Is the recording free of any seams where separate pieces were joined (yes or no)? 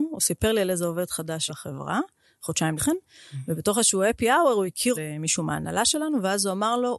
no